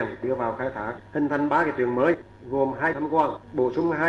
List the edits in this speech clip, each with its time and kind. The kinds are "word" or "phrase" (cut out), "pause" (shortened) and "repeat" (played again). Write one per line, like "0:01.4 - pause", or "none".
0:02.9 - word